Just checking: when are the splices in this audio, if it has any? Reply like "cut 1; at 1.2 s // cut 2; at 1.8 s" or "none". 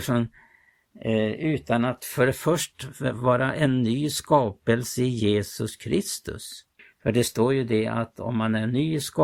cut 1; at 6.8 s